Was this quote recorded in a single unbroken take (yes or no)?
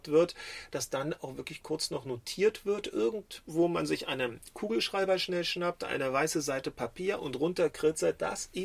yes